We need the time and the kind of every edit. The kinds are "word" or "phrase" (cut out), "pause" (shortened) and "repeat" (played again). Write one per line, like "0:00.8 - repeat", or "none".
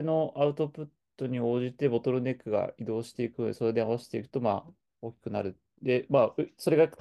none